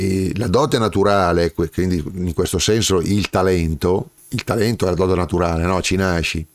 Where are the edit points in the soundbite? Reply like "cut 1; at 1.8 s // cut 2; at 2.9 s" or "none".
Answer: cut 1; at 4.2 s